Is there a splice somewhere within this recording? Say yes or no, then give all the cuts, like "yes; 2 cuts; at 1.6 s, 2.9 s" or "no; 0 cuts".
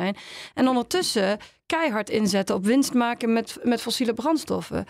no; 0 cuts